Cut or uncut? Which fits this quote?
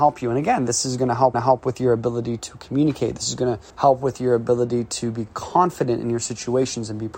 cut